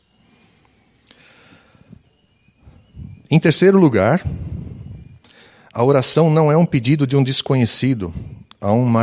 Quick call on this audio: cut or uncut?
uncut